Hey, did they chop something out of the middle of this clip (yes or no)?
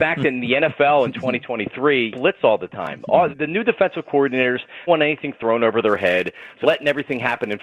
yes